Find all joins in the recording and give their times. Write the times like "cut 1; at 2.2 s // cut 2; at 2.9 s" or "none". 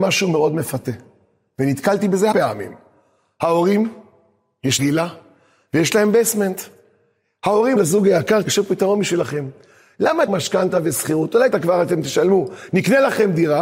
cut 1; at 2.3 s // cut 2; at 4.8 s // cut 3; at 7.8 s // cut 4; at 8.4 s // cut 5; at 10.3 s // cut 6; at 11.5 s